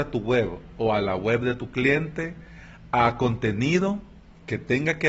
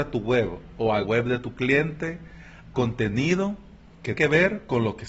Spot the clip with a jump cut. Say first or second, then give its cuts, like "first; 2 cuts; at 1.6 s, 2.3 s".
second; 3 cuts; at 1.0 s, 2.7 s, 4.1 s